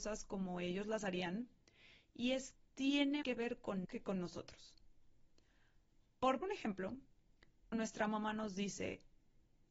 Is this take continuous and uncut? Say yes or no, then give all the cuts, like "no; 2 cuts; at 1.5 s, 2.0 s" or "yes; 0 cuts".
no; 5 cuts; at 2.6 s, 3.2 s, 3.8 s, 6.4 s, 7.7 s